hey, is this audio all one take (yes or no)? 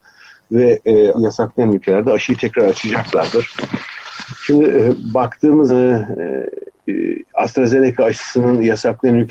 no